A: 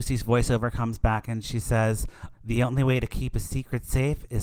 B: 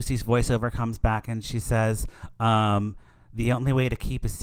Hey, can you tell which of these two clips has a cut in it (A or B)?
A